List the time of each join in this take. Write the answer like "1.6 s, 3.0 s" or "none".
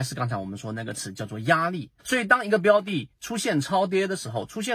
2.0 s